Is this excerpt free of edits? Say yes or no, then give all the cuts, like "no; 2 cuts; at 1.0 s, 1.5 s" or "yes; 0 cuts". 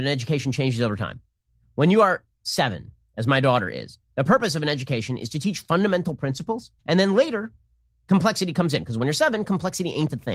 no; 2 cuts; at 2.3 s, 6.8 s